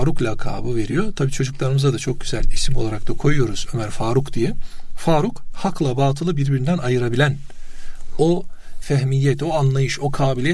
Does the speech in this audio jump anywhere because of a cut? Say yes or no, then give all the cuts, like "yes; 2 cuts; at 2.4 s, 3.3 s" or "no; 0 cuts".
no; 0 cuts